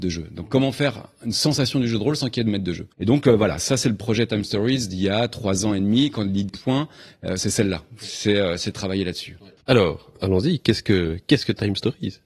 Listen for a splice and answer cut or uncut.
cut